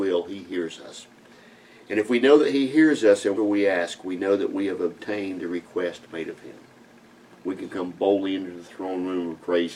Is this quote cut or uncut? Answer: cut